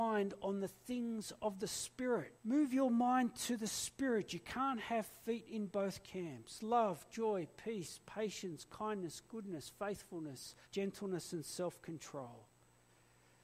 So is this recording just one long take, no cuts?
no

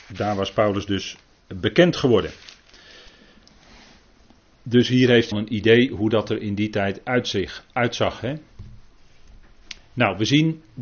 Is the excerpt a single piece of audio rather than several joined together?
no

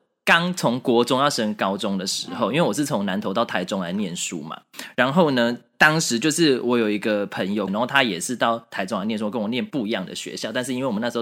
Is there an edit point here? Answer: yes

